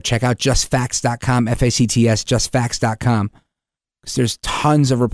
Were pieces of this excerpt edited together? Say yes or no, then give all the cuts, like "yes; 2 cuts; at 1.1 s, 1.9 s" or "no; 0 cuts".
no; 0 cuts